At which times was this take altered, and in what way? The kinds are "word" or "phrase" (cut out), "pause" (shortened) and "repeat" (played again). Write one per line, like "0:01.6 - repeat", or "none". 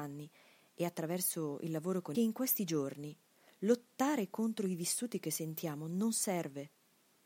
0:02.1 - phrase